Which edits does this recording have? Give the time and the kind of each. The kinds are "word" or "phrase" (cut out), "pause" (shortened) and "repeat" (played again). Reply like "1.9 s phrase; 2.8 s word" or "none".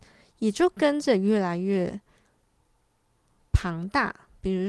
none